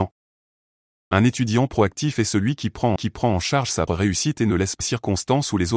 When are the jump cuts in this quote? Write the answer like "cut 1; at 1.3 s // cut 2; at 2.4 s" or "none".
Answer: cut 1; at 3.0 s // cut 2; at 3.9 s // cut 3; at 4.8 s